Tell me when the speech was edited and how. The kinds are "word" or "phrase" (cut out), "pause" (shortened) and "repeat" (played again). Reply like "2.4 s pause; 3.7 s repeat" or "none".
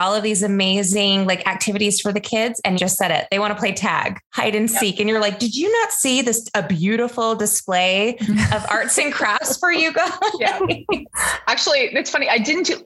2.8 s word; 4.2 s pause